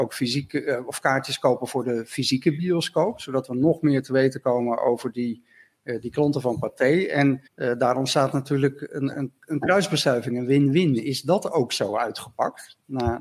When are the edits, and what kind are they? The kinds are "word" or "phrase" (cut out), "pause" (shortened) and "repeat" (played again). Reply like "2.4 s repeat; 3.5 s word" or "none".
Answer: 7.5 s pause